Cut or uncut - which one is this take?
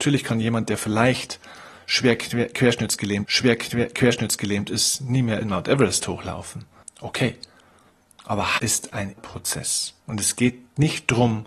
cut